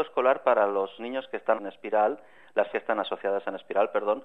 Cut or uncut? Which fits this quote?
cut